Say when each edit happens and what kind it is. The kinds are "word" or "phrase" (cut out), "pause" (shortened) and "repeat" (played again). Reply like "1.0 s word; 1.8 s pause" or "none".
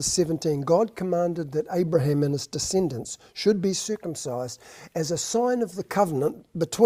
none